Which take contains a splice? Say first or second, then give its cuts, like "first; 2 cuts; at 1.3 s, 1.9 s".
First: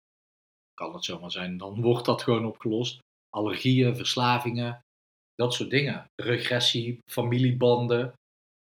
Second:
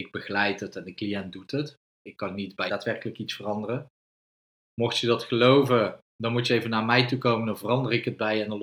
second; 1 cut; at 2.7 s